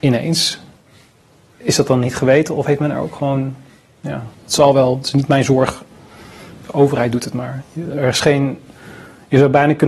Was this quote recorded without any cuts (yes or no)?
no